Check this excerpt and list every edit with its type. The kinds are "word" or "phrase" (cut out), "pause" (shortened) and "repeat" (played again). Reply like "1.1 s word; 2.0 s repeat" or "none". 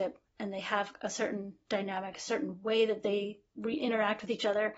3.5 s pause